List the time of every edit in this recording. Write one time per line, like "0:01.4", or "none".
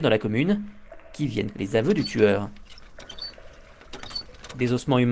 0:01.5